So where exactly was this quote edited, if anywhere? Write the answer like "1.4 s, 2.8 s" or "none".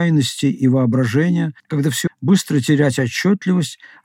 1.6 s, 2.1 s

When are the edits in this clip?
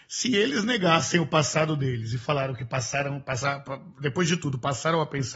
none

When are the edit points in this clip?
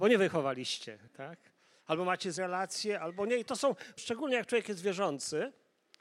1.1 s, 2.4 s, 4.0 s

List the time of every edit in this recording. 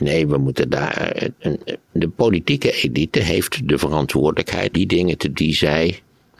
1.4 s, 1.9 s, 4.7 s, 5.3 s

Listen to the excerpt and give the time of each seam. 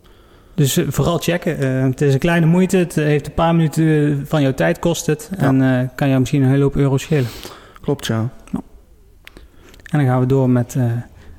none

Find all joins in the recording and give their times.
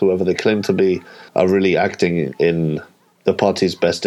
1.3 s

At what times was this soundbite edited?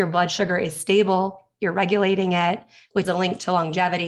3.0 s

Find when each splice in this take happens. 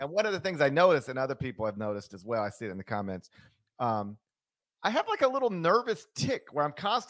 none

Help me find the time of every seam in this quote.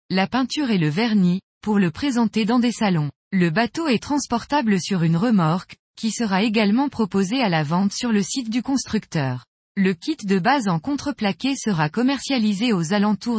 3.2 s, 9.6 s

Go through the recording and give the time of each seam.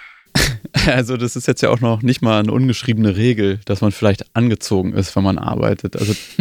none

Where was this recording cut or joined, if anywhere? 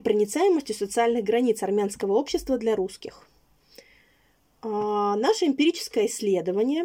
none

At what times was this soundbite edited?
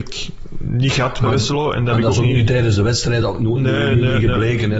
none

